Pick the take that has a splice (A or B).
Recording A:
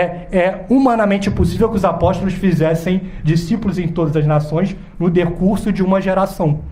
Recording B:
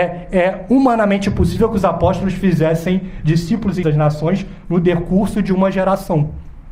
B